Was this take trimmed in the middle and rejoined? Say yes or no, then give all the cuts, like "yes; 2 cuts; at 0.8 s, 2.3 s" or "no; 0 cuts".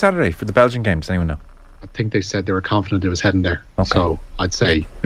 no; 0 cuts